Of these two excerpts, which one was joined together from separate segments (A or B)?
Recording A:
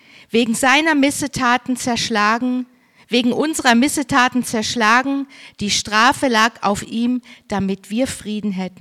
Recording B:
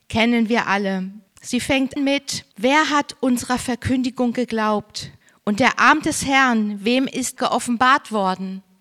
B